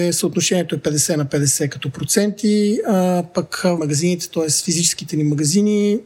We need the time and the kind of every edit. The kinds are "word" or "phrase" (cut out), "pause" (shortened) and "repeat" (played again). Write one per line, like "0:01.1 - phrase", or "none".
0:03.8 - phrase

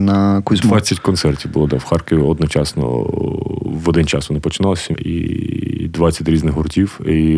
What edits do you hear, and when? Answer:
0:04.9 - word

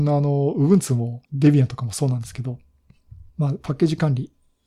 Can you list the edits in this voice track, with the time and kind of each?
0:01.2 - pause
0:03.3 - pause

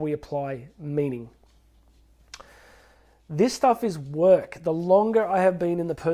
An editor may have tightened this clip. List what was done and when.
none

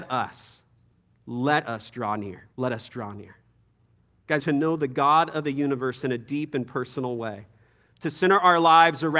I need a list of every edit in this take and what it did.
0:02.5 - pause
0:04.4 - phrase

